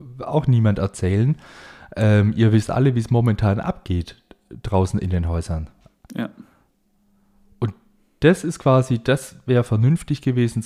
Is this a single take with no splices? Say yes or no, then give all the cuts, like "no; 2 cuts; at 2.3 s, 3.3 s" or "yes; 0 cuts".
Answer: no; 1 cut; at 6.8 s